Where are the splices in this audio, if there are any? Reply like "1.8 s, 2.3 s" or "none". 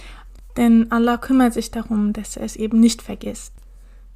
none